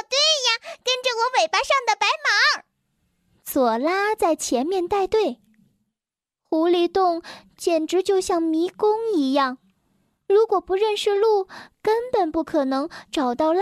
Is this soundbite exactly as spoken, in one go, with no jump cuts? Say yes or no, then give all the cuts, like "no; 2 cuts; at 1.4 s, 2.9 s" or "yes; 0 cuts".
yes; 0 cuts